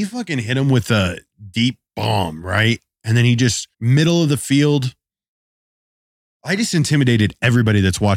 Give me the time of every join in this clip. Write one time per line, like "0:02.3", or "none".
0:01.9
0:03.7
0:06.1